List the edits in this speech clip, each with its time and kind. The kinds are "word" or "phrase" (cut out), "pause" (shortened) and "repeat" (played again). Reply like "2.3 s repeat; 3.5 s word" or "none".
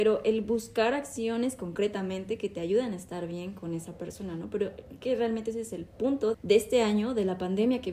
5.0 s word; 6.3 s word